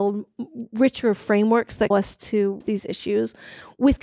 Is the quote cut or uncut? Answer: cut